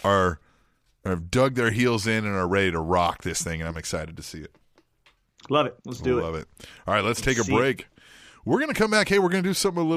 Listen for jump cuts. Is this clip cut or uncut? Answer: cut